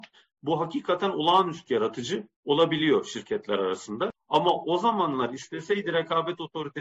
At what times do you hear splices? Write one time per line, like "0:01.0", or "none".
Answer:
0:01.7
0:02.3